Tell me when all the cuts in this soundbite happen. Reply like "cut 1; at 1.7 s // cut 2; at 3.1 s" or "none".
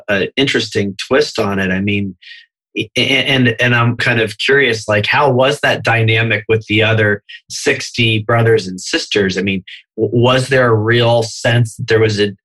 cut 1; at 4.0 s